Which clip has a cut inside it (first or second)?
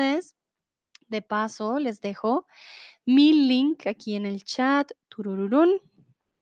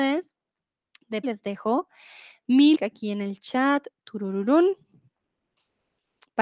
second